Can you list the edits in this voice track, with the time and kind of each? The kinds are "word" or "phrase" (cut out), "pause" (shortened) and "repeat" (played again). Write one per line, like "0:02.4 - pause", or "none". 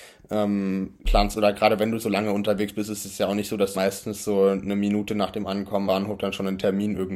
0:01.0 - word
0:03.7 - word
0:05.9 - word